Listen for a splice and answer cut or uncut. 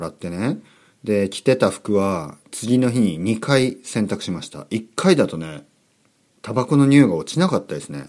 uncut